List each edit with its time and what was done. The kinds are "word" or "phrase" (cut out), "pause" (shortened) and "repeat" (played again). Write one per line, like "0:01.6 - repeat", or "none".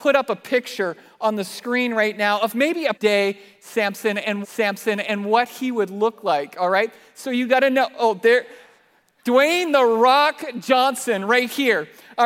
0:02.9 - word
0:04.4 - repeat